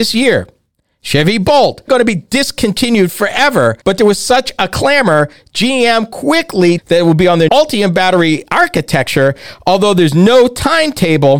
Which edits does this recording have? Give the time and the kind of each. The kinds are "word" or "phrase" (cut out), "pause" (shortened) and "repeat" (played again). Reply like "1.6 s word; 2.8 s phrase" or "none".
1.9 s word; 3.8 s pause; 6.8 s phrase; 7.5 s word

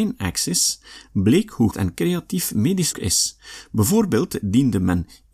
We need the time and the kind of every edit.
1.7 s word; 2.9 s word

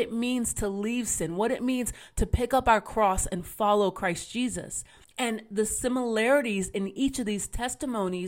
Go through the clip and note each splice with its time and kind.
5.0 s pause

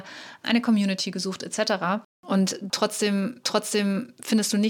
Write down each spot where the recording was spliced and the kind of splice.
3.4 s repeat

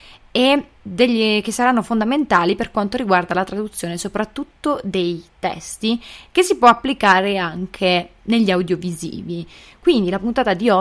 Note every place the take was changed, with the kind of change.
none

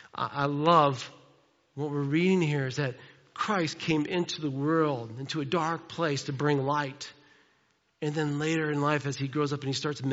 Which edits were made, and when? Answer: none

